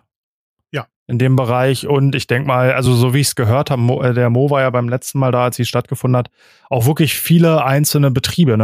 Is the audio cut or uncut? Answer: uncut